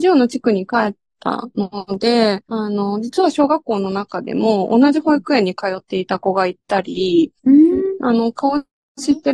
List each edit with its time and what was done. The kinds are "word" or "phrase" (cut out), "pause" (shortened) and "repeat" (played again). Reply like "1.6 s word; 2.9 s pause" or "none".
2.5 s pause; 7.4 s pause